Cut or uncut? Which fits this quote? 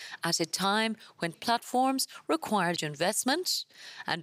cut